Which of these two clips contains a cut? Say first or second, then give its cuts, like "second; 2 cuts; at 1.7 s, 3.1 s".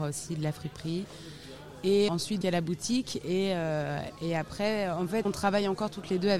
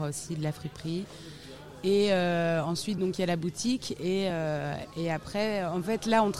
first; 3 cuts; at 2.1 s, 2.4 s, 5.2 s